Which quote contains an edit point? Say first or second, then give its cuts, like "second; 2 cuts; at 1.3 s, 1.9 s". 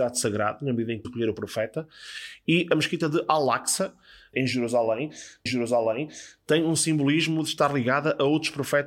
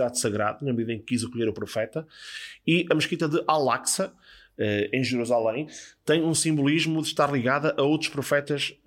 first; 3 cuts; at 1.0 s, 4.3 s, 5.5 s